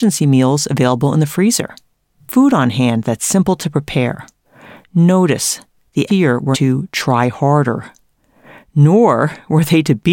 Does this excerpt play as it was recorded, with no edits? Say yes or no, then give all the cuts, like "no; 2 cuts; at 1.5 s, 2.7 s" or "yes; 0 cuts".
no; 4 cuts; at 2.3 s, 4.4 s, 6.1 s, 6.5 s